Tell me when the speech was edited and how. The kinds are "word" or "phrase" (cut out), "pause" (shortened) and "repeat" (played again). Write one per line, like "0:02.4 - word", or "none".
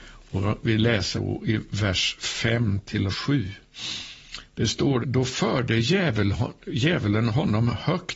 0:01.1 - word
0:03.1 - word
0:05.0 - word

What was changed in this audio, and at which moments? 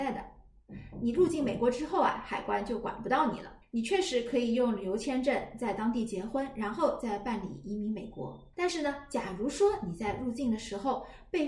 0:03.6 - pause
0:08.5 - pause

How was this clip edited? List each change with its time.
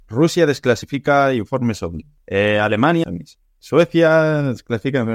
0:03.0 - phrase

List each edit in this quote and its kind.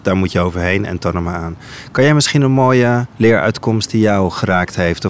0:03.1 - pause

